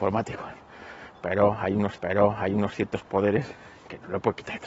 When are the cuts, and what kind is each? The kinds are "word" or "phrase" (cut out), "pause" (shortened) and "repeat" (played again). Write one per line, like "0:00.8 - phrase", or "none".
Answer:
0:02.0 - repeat

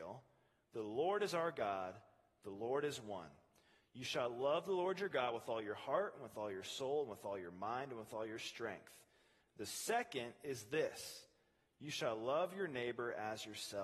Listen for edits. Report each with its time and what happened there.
none

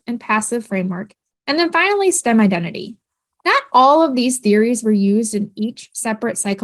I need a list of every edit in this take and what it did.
none

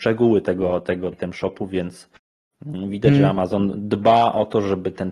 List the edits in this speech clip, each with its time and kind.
0:01.1 - word

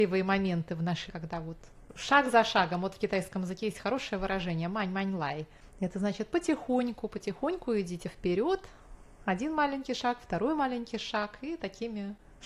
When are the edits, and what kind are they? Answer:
0:01.1 - word

